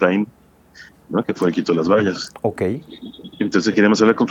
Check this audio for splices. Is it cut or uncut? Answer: cut